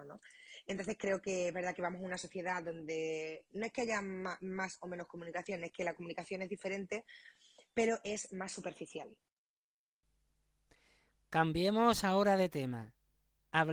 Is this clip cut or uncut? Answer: uncut